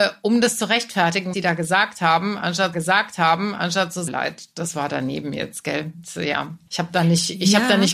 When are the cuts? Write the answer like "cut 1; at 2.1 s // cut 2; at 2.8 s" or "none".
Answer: cut 1; at 1.3 s // cut 2; at 2.7 s // cut 3; at 4.1 s // cut 4; at 6.7 s